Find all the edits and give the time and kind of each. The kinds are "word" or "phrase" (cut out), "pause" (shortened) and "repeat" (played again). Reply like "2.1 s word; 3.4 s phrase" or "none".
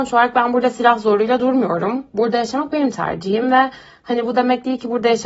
none